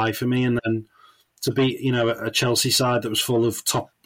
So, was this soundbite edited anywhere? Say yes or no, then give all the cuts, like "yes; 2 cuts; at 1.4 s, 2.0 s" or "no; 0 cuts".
no; 0 cuts